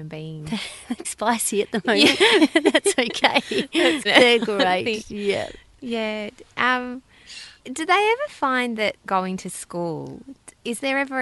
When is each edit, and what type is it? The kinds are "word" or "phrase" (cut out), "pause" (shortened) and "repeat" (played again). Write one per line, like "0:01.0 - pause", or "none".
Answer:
0:01.0 - word
0:04.0 - phrase
0:07.6 - pause
0:09.0 - pause